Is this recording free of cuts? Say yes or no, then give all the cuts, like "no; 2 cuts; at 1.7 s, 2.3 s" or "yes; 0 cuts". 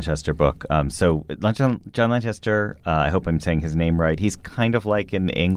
yes; 0 cuts